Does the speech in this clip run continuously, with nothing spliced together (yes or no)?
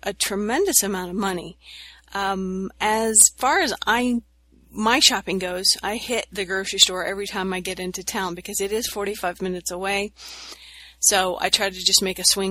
yes